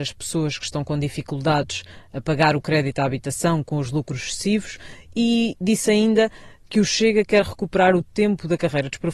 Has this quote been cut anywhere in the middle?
no; 0 cuts

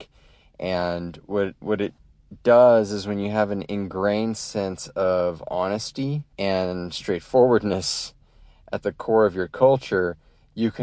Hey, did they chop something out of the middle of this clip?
yes; 1 cut; at 6.3 s

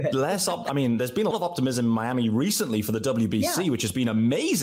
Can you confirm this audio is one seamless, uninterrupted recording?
no; 1 cut; at 1.3 s

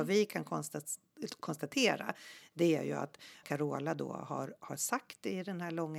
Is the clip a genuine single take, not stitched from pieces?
no; 1 cut; at 3.4 s

